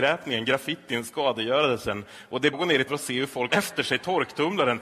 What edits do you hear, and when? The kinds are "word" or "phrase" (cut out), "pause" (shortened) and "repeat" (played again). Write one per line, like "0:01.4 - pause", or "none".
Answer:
0:02.5 - word
0:02.9 - word
0:03.5 - word